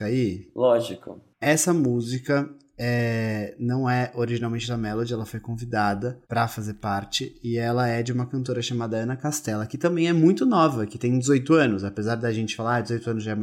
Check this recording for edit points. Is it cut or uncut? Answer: cut